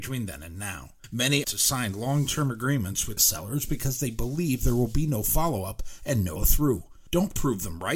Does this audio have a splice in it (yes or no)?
yes